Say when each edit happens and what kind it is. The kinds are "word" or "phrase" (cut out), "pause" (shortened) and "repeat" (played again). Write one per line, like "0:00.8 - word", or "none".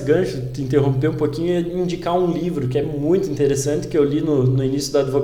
none

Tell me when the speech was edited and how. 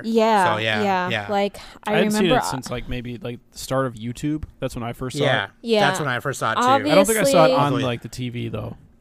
none

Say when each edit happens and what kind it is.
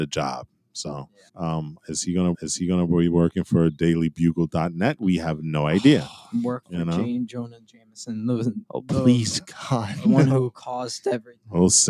0:01.3 - pause
0:02.3 - repeat

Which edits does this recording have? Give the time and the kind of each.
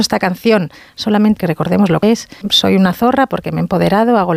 0:01.4 - phrase
0:02.0 - word
0:02.4 - word

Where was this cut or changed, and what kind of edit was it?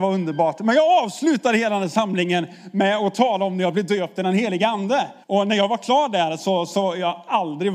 0:05.2 - pause

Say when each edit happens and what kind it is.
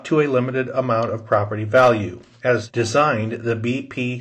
none

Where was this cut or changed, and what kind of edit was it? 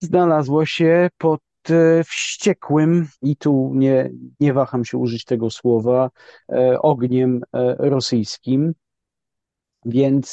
0:03.1 - pause
0:04.3 - pause

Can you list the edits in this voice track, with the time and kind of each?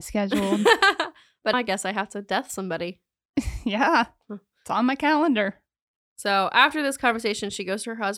0:01.5 - word

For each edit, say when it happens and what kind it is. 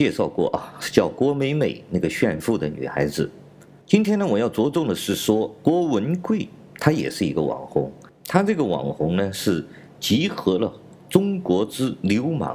0:03.6 - pause

